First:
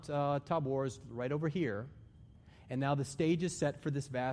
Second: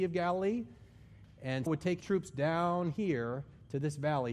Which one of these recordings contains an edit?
second; 2 cuts; at 1.7 s, 2.0 s

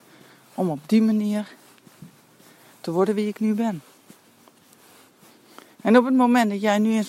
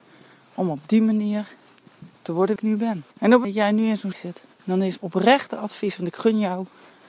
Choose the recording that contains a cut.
second; 7 cuts; at 2.1 s, 2.6 s, 3.1 s, 3.4 s, 4.1 s, 4.5 s, 5.0 s

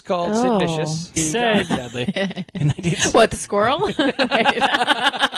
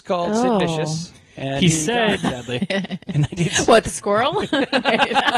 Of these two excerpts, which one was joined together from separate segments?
first; 1 cut; at 1.2 s

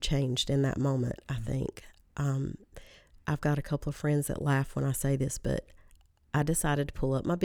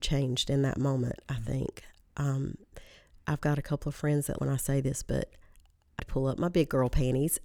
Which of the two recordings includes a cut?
second; 2 cuts; at 4.4 s, 6.0 s

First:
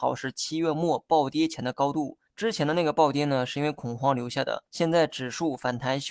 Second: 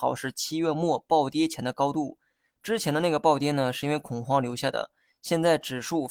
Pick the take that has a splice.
first; 2 cuts; at 2.3 s, 4.7 s

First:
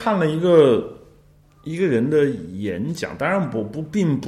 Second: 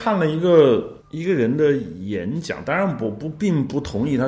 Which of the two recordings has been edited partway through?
second; 1 cut; at 1.0 s

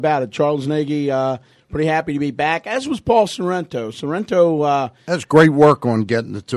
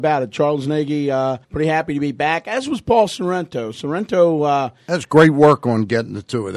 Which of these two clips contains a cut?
second; 1 cut; at 1.4 s

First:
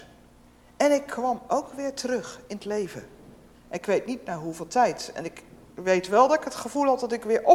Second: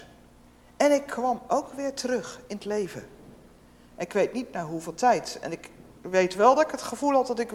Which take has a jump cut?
first; 1 cut; at 3.5 s

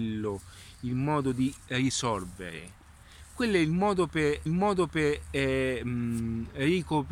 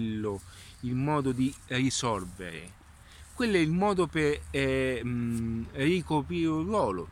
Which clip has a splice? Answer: first; 1 cut; at 4.5 s

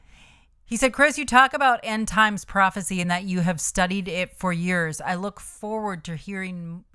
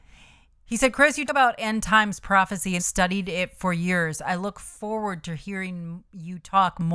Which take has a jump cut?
second; 2 cuts; at 1.3 s, 2.8 s

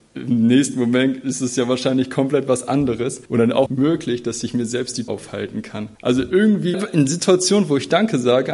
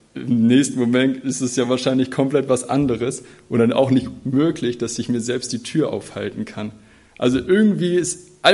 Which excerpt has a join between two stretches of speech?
first; 5 cuts; at 3.3 s, 3.7 s, 5.1 s, 5.9 s, 6.7 s

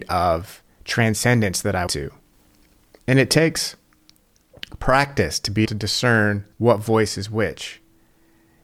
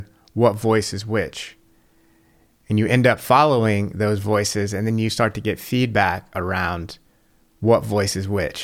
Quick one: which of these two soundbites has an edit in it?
first; 4 cuts; at 1.9 s, 2.3 s, 5.6 s, 6.5 s

